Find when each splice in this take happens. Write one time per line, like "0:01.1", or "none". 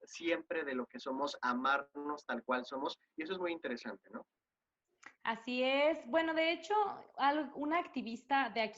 0:05.1